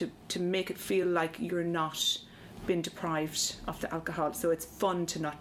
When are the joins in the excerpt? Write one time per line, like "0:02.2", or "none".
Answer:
none